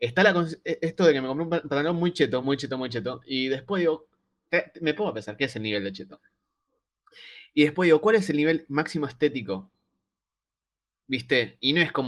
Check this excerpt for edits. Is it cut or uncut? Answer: uncut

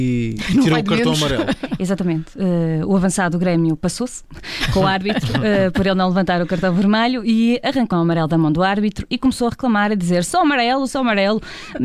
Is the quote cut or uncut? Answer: cut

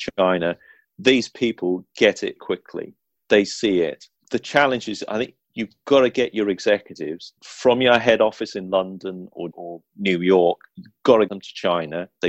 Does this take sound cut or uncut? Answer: cut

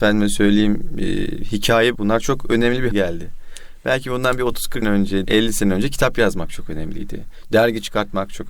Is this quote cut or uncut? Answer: cut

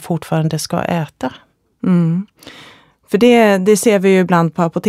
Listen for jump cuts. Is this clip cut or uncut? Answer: uncut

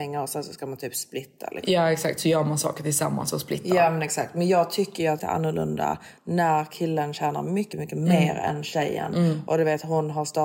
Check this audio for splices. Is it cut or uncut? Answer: cut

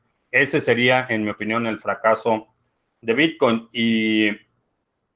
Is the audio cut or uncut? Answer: uncut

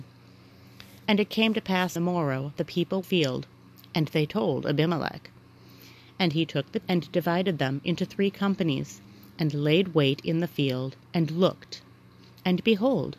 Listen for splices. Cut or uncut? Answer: cut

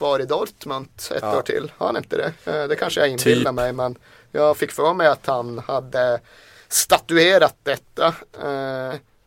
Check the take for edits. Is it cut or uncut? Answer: uncut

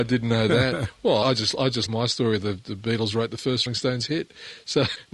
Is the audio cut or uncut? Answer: cut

